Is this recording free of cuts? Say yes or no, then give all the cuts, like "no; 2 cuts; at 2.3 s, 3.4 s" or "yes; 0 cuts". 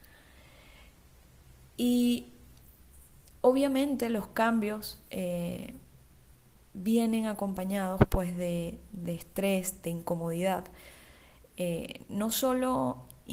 yes; 0 cuts